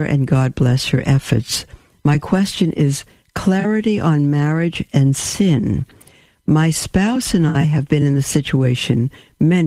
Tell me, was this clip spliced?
no; 0 cuts

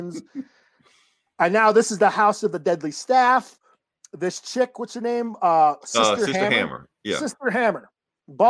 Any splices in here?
no; 0 cuts

